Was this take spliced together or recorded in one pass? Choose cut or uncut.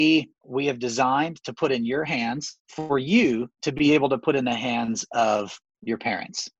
uncut